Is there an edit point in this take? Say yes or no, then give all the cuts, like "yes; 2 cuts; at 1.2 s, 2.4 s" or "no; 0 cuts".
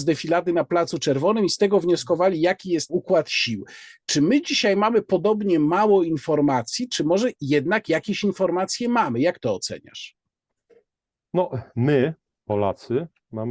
yes; 1 cut; at 2.9 s